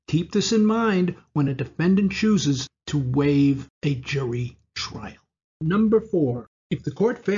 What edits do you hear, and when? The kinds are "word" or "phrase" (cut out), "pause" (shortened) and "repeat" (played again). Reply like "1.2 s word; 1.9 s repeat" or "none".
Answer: none